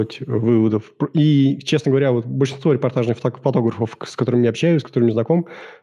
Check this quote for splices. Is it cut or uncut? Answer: uncut